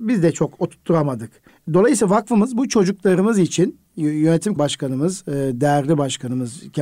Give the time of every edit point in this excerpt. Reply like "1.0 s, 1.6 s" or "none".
1.5 s, 4.6 s

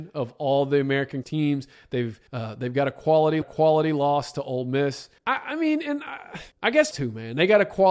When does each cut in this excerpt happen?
1.2 s, 2.3 s, 3.4 s, 5.2 s, 6.5 s, 6.9 s

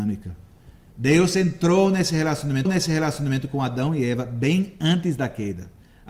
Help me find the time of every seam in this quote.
2.6 s

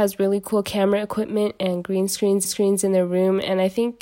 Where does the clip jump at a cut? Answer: 2.4 s

